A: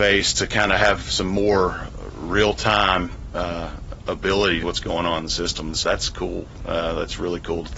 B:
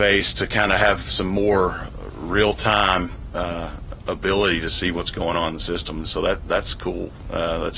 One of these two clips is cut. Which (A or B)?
A